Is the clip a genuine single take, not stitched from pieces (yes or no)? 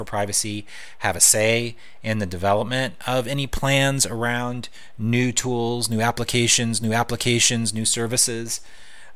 no